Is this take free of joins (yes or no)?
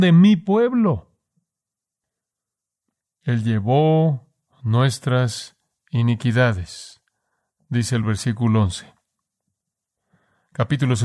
yes